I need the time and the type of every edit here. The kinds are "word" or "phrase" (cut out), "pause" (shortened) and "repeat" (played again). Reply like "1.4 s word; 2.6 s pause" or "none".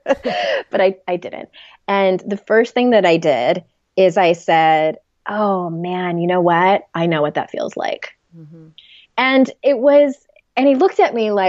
none